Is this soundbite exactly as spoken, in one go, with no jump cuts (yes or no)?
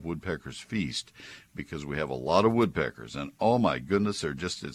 yes